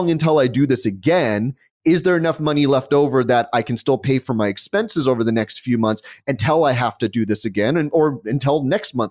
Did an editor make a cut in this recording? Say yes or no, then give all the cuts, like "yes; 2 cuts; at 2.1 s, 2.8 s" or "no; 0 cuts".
no; 0 cuts